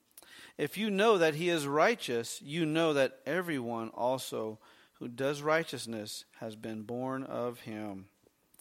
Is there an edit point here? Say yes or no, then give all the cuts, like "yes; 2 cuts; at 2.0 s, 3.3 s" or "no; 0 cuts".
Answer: no; 0 cuts